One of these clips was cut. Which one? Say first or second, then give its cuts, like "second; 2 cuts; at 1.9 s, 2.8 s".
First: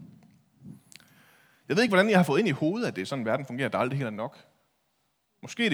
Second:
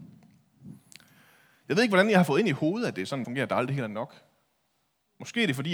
second; 1 cut; at 3.2 s